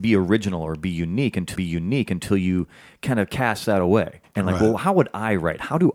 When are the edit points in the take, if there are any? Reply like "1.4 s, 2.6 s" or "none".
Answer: 1.6 s, 4.2 s, 4.8 s